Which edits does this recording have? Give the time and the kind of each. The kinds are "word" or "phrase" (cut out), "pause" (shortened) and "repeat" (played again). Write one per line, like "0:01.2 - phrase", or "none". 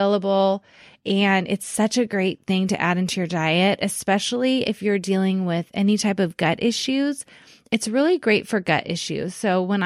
none